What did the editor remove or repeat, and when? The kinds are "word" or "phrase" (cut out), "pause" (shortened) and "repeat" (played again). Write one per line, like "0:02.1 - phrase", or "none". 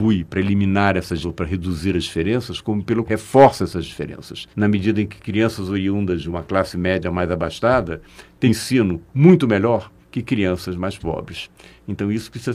0:01.2 - word
0:03.1 - word
0:04.5 - pause
0:08.5 - word
0:10.0 - pause

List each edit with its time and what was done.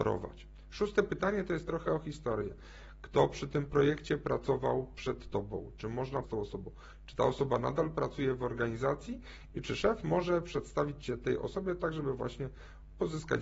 0:06.2 - word

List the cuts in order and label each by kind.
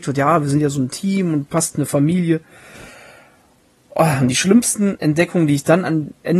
none

